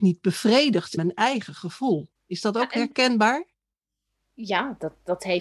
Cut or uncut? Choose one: cut